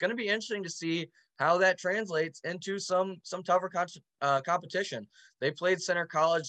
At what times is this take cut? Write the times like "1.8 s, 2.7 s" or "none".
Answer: none